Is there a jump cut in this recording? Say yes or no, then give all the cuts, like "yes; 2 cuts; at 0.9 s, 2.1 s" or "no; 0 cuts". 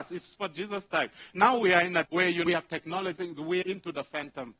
yes; 4 cuts; at 2.1 s, 2.5 s, 3.2 s, 3.6 s